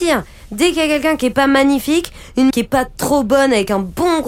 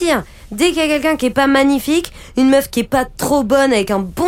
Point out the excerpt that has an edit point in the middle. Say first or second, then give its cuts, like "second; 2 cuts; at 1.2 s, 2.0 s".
first; 1 cut; at 2.5 s